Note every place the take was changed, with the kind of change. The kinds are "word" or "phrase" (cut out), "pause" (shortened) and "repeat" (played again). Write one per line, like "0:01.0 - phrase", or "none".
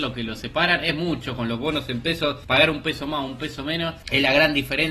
none